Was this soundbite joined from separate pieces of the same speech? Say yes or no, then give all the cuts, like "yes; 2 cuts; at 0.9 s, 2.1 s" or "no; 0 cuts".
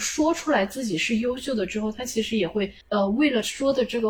yes; 1 cut; at 2.8 s